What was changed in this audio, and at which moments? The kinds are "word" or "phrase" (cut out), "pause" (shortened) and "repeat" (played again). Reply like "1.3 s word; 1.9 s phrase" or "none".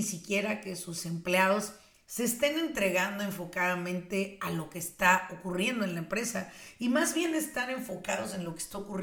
none